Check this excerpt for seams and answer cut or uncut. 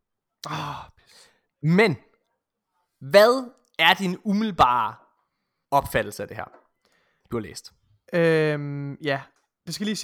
uncut